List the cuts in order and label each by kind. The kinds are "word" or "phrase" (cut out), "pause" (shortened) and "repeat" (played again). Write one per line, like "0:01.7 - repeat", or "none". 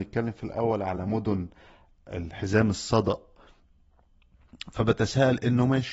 none